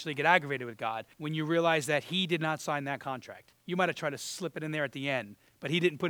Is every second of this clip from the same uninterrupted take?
no; 2 cuts; at 1.1 s, 3.6 s

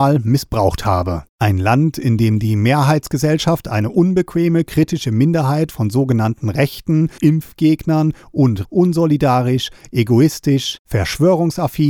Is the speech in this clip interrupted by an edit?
yes; 3 cuts; at 1.3 s, 7.2 s, 8.6 s

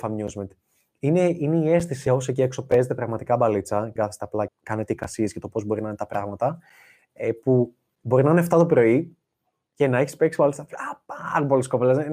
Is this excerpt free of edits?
no; 3 cuts; at 2.1 s, 4.0 s, 4.5 s

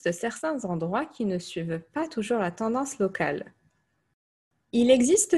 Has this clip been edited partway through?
no; 0 cuts

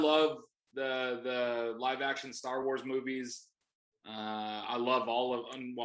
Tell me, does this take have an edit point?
no; 0 cuts

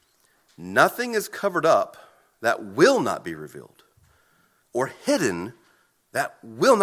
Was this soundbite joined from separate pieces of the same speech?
no; 0 cuts

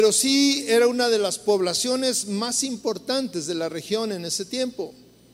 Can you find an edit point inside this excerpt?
no; 0 cuts

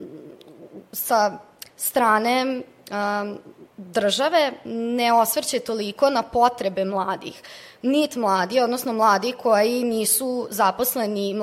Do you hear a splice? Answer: yes; 1 cut; at 1.7 s

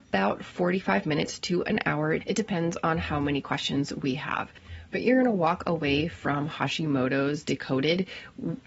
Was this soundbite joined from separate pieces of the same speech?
no; 0 cuts

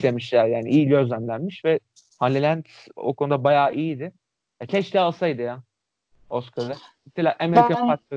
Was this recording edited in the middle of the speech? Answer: no; 0 cuts

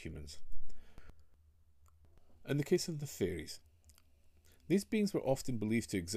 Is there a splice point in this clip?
no; 0 cuts

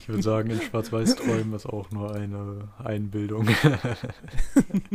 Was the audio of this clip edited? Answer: no; 0 cuts

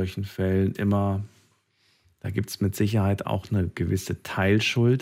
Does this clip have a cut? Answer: no; 0 cuts

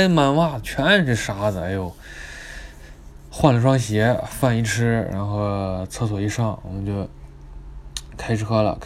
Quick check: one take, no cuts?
yes; 0 cuts

